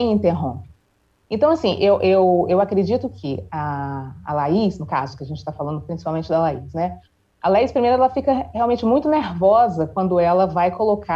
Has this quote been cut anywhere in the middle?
no; 0 cuts

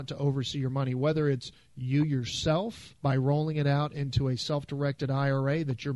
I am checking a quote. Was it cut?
yes; 1 cut; at 3.0 s

